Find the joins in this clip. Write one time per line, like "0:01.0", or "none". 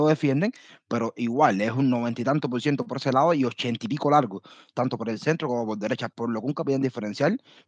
none